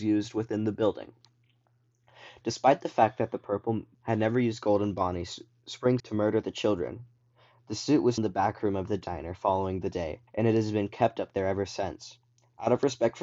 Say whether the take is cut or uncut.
cut